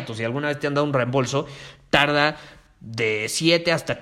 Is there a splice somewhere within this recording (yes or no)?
no